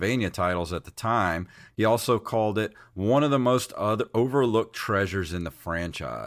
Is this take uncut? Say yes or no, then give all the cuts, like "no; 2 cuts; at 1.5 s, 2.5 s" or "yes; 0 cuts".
yes; 0 cuts